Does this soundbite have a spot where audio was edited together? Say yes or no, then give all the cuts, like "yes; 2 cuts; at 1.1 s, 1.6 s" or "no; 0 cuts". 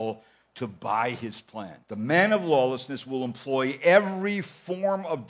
yes; 1 cut; at 1.8 s